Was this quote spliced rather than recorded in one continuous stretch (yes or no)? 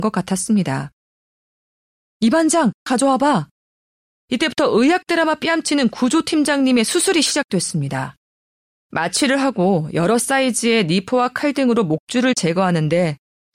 yes